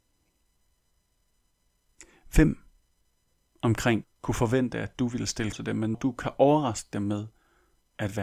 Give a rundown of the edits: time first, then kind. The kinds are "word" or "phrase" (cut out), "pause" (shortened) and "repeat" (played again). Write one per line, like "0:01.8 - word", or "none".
0:04.0 - word
0:05.5 - word
0:05.9 - word